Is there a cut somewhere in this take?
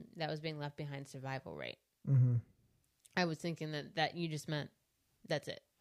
no; 0 cuts

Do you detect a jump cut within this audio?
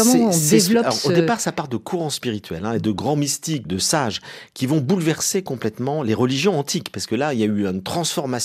yes; 1 cut; at 3.6 s

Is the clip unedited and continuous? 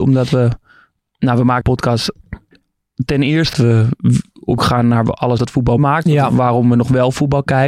no; 5 cuts; at 1.6 s, 3.5 s, 4.6 s, 5.4 s, 5.8 s

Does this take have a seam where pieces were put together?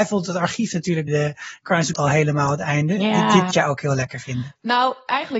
yes; 3 cuts; at 1.1 s, 1.9 s, 3.5 s

